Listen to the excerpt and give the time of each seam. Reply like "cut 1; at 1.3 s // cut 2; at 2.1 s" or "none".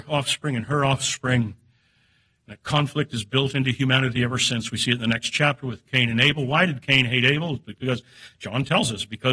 none